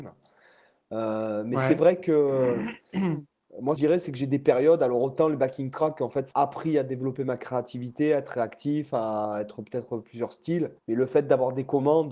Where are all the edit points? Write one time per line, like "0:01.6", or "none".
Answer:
0:03.8
0:06.3
0:10.8